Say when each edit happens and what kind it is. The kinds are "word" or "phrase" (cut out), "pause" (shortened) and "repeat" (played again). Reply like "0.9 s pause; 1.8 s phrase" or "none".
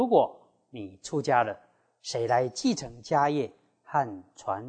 none